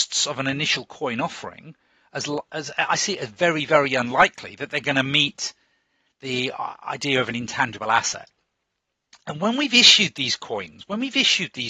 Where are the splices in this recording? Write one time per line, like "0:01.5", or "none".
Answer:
none